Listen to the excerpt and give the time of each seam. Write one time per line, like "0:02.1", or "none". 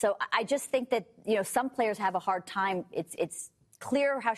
none